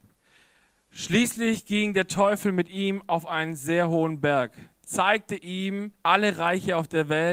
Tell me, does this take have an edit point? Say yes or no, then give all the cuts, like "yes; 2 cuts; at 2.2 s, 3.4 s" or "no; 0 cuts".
yes; 1 cut; at 6.0 s